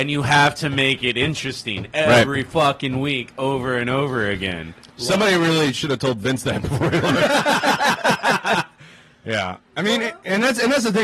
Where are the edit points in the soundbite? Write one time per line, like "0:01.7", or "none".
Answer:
0:04.8